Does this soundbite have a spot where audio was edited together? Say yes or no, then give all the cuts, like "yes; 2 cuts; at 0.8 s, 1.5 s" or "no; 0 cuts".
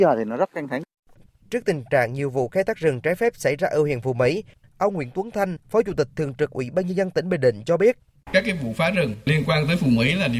no; 0 cuts